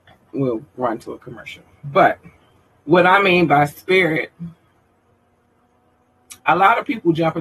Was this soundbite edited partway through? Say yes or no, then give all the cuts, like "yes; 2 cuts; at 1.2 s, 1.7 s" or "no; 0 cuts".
yes; 2 cuts; at 2.7 s, 6.4 s